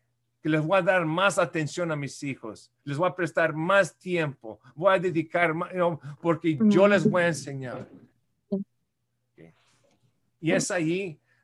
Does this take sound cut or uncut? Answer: cut